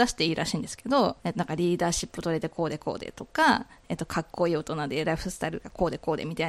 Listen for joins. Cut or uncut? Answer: cut